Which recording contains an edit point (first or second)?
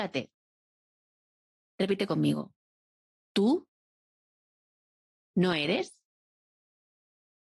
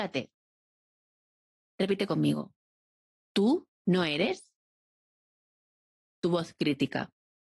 second